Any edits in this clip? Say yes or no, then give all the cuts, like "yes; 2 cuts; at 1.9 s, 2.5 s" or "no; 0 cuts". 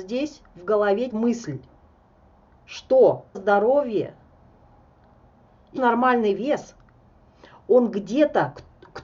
yes; 3 cuts; at 1.1 s, 3.3 s, 5.8 s